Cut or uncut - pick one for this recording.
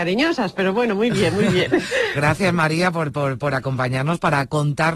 cut